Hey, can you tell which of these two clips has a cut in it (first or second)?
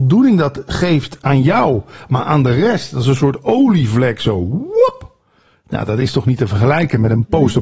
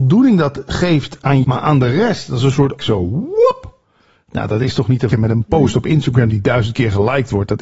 second